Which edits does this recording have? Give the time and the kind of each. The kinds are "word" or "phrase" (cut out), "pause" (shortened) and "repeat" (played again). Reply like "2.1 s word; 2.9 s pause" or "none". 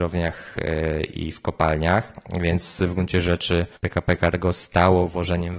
3.8 s pause